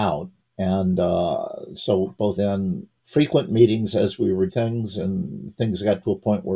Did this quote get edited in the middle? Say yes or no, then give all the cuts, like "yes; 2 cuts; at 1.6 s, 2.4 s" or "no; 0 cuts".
yes; 2 cuts; at 2.4 s, 4.5 s